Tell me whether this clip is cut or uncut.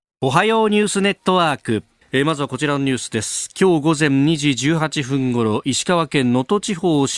uncut